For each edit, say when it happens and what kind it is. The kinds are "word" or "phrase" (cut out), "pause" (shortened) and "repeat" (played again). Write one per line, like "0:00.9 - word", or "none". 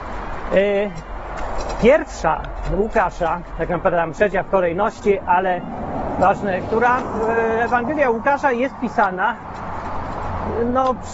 none